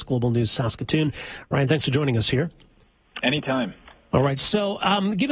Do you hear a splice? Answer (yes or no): no